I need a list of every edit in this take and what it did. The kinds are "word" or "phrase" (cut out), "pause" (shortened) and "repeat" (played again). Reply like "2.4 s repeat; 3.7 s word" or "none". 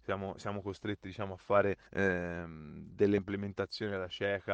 1.9 s pause